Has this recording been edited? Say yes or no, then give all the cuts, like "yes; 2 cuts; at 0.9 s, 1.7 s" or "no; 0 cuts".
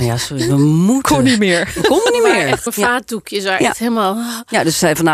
yes; 1 cut; at 2.7 s